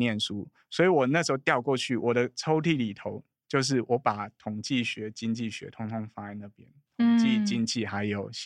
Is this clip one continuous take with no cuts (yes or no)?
yes